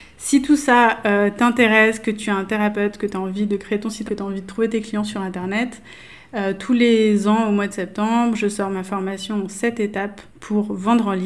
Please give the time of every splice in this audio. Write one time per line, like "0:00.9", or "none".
0:04.1
0:10.3